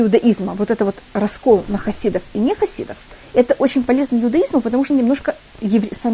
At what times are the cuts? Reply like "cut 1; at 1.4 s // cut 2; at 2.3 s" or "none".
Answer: cut 1; at 1.0 s // cut 2; at 4.9 s